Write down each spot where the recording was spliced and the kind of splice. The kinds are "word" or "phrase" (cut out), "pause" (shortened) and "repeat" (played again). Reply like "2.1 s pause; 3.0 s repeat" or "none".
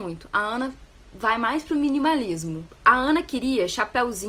none

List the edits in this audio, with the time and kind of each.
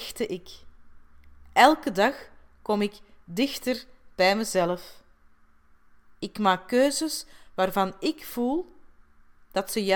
none

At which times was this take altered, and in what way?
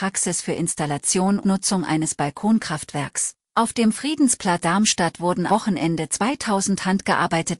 1.4 s word; 3.4 s pause; 4.6 s word; 5.5 s word

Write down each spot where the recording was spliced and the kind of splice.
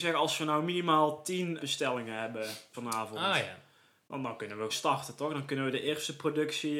1.6 s word; 2.7 s word; 4.7 s word

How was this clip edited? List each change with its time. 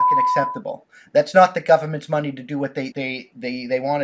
2.9 s word

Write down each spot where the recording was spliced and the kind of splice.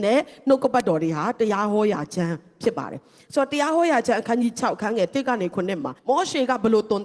6.0 s pause

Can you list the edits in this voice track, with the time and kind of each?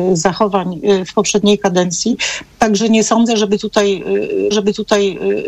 4.5 s repeat

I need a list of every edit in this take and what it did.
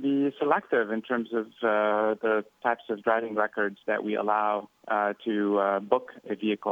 4.8 s pause

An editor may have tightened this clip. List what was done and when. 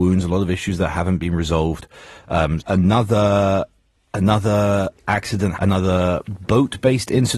2.6 s word; 5.6 s word

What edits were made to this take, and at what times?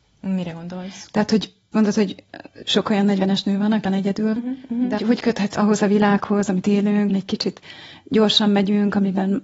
1.7 s word; 3.8 s word; 4.4 s word; 5.0 s word; 5.5 s word; 7.1 s word

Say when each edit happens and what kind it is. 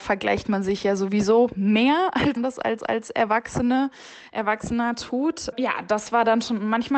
2.4 s word; 2.8 s repeat

